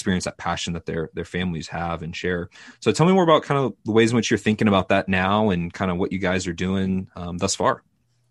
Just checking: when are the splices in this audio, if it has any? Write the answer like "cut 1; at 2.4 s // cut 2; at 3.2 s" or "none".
none